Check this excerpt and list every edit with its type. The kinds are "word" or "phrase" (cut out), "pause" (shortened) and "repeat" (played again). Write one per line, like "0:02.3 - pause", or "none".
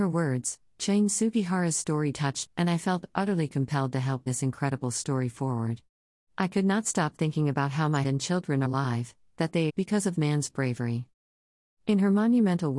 0:02.1 - word
0:02.5 - word
0:04.3 - word
0:08.0 - word
0:08.6 - word
0:09.7 - word
0:10.1 - word